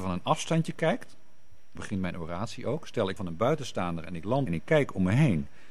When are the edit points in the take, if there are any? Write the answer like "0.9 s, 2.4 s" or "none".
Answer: 1.8 s, 3.2 s, 4.5 s